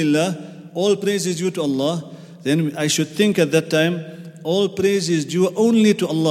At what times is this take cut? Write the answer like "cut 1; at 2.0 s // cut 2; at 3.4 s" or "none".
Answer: none